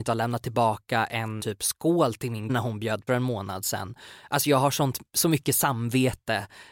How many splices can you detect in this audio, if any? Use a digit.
3